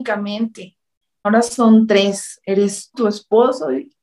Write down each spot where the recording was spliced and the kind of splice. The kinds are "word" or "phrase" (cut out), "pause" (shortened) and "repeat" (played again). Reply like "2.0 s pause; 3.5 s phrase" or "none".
1.2 s word; 2.9 s word